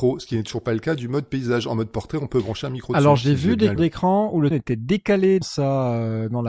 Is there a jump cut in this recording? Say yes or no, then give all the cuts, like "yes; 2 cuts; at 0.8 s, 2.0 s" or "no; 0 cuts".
yes; 3 cuts; at 3.8 s, 4.5 s, 5.4 s